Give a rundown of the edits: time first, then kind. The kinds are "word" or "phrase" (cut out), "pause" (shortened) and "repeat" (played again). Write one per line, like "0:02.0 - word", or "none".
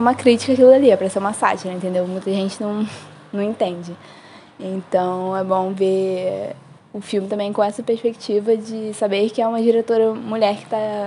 none